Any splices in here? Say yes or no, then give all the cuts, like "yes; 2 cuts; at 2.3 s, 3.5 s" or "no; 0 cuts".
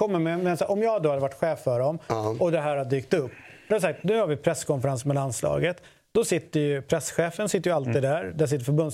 no; 0 cuts